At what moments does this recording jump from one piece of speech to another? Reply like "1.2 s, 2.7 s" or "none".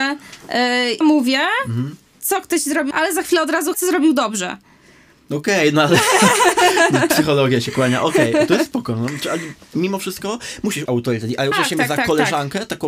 1.0 s, 2.9 s, 3.7 s, 8.7 s, 10.9 s, 11.5 s